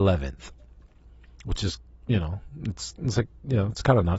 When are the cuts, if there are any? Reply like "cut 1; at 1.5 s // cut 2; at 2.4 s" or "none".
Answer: none